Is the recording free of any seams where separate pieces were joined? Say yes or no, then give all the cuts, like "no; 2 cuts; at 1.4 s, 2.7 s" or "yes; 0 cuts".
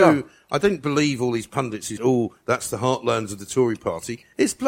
no; 1 cut; at 2.0 s